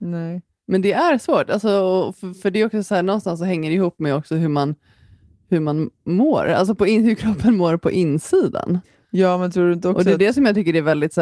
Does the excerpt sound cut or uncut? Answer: uncut